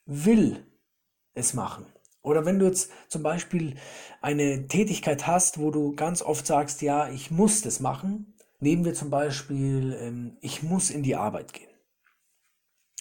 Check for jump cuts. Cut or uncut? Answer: uncut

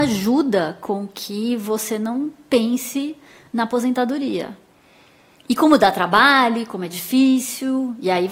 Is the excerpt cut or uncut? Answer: uncut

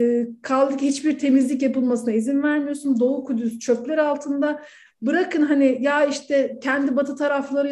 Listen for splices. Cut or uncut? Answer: uncut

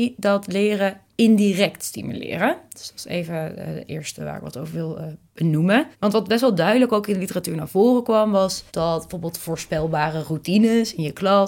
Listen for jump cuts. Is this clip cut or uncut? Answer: cut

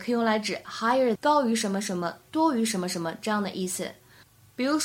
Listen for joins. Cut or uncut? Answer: cut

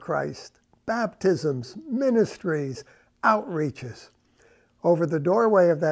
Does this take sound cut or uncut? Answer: uncut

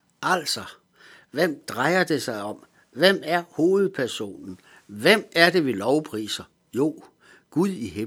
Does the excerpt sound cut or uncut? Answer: uncut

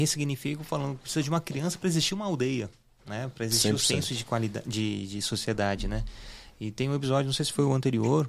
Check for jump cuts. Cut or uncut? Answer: uncut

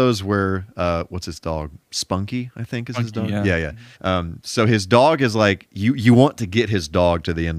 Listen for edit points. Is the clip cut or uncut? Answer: cut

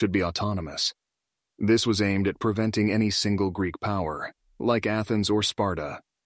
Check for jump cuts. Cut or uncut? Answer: uncut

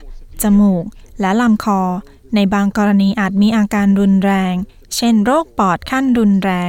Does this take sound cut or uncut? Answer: uncut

